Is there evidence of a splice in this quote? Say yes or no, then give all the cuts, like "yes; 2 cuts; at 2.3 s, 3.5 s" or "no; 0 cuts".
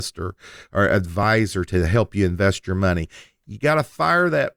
no; 0 cuts